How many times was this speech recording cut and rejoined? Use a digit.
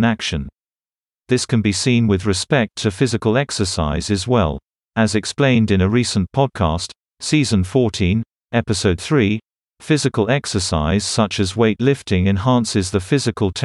0